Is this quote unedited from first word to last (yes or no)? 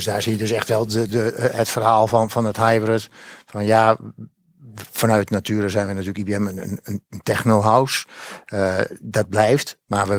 yes